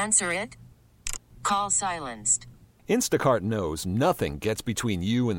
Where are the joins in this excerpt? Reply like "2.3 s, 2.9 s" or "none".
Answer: none